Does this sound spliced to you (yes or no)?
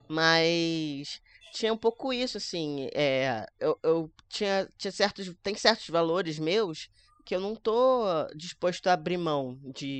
no